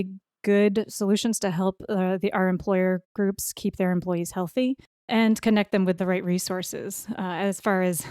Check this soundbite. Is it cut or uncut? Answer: cut